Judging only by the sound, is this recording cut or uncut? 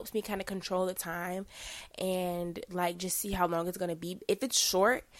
uncut